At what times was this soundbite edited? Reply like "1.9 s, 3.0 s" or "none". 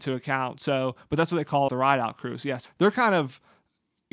1.7 s, 2.6 s